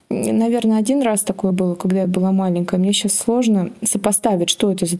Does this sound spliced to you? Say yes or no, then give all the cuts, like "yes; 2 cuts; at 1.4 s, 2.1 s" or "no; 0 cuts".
no; 0 cuts